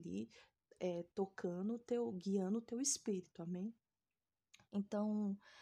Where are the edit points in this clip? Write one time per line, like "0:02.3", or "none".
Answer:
none